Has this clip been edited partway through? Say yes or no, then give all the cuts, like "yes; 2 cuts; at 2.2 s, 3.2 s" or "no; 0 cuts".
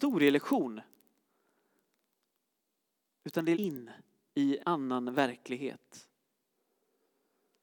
yes; 2 cuts; at 3.5 s, 4.6 s